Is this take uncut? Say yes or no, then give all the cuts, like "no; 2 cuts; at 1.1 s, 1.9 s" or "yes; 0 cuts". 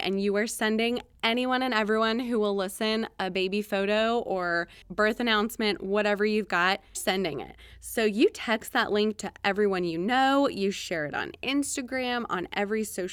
no; 1 cut; at 6.9 s